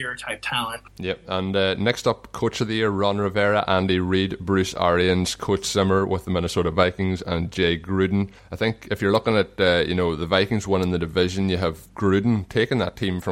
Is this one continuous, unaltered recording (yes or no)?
yes